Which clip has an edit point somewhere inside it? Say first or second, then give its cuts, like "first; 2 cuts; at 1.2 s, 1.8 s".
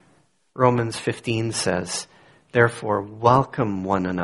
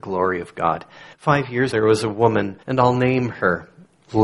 second; 3 cuts; at 1.1 s, 1.7 s, 2.6 s